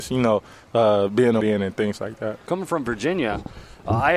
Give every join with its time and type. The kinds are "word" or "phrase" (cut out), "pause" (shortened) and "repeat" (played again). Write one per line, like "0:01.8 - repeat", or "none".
0:01.4 - phrase